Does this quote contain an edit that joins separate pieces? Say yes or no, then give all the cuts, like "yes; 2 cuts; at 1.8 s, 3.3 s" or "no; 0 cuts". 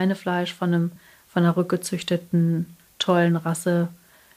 no; 0 cuts